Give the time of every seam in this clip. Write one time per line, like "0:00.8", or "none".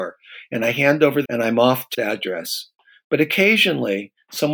0:01.3
0:01.9